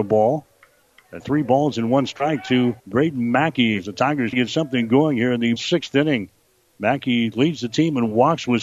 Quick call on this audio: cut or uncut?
cut